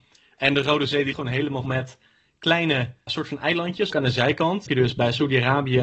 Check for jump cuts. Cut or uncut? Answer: cut